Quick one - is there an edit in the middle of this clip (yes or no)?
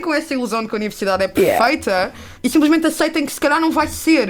yes